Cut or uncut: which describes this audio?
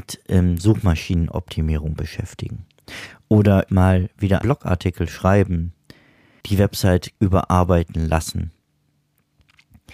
cut